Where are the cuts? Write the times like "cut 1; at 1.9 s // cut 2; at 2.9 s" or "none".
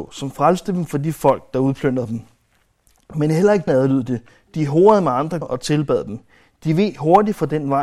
cut 1; at 3.7 s // cut 2; at 5.4 s

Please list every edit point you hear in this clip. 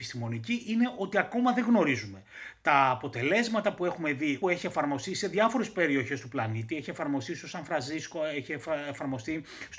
cut 1; at 4.4 s

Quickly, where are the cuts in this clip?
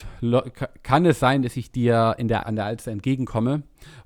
cut 1; at 2.4 s

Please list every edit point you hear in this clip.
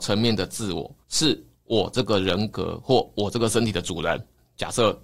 cut 1; at 1.0 s

